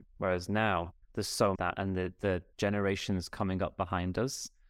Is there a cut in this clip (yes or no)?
yes